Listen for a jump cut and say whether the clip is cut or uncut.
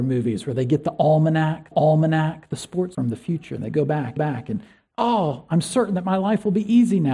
cut